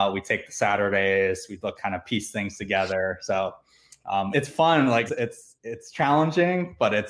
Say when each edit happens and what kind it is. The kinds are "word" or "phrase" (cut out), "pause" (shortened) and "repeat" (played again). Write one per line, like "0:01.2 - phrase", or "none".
0:01.8 - phrase
0:04.3 - word
0:05.1 - word
0:05.5 - pause

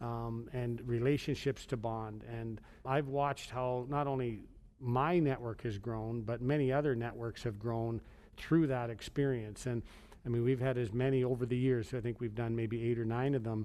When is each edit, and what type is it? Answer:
0:02.8 - word

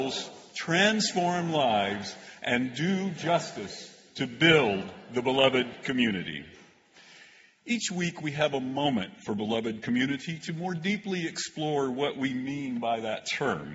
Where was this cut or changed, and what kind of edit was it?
none

